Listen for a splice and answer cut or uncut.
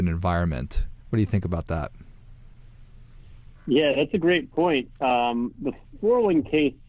uncut